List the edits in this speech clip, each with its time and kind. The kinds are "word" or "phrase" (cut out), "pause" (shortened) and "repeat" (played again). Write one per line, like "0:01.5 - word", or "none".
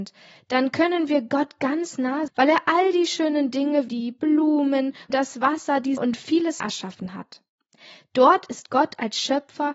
0:02.3 - word
0:03.9 - word
0:05.1 - word
0:06.0 - word
0:06.6 - word